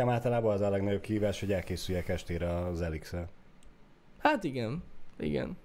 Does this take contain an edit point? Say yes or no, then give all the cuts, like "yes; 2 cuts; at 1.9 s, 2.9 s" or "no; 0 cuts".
no; 0 cuts